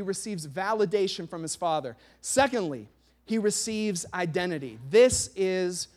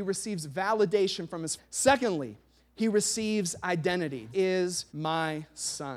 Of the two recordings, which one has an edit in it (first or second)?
second